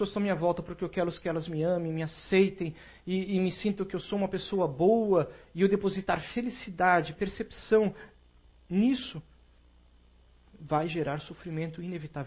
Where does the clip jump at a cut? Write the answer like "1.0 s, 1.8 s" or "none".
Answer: none